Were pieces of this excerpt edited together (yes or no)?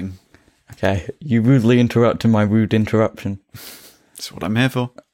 no